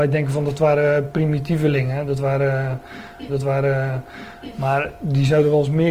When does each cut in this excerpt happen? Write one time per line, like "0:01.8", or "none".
0:03.3